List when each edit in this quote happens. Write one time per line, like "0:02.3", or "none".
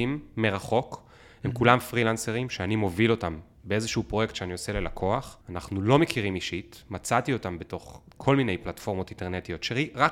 0:05.4
0:08.1